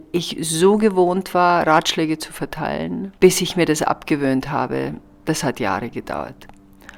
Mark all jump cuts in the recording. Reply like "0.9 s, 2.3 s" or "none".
3.2 s